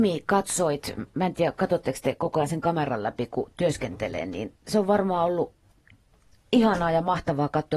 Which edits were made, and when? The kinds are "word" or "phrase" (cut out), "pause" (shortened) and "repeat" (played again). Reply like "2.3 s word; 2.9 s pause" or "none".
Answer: none